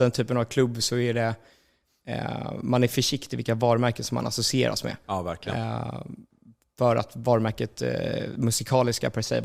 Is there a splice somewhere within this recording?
no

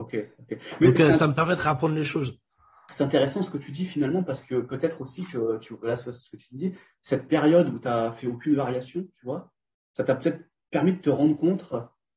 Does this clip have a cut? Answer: no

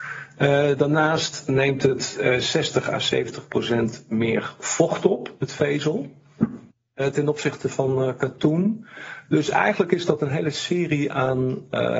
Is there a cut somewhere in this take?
no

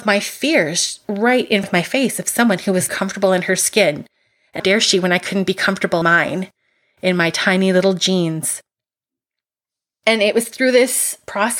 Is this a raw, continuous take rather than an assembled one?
no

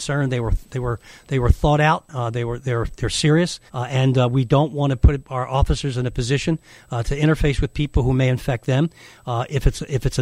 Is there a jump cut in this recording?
yes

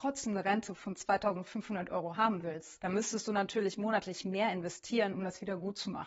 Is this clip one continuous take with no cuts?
yes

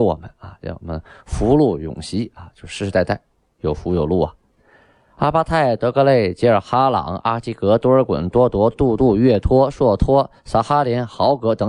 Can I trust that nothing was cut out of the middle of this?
yes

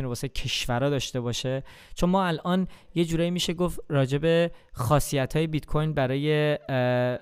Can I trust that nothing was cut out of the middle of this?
yes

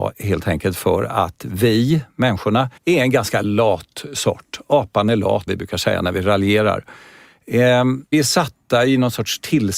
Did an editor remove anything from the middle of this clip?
yes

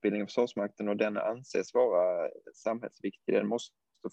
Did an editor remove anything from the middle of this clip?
no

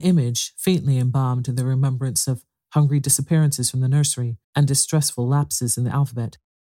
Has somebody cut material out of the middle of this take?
yes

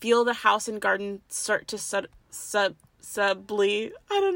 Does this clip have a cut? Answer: no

